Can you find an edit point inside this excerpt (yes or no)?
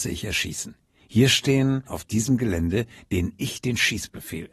yes